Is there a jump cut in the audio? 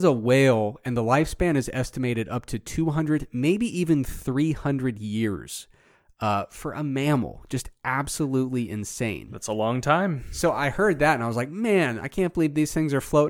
no; 0 cuts

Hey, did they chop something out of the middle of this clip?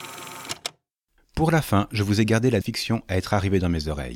yes; 1 cut; at 2.6 s

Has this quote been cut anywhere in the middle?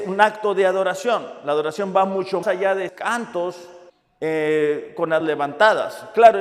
yes; 4 cuts; at 2.4 s, 2.9 s, 3.9 s, 5.2 s

